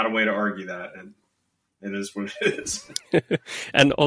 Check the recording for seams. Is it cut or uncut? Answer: uncut